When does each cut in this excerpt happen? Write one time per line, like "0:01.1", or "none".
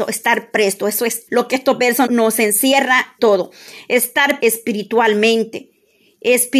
0:01.3
0:02.1
0:03.2
0:04.4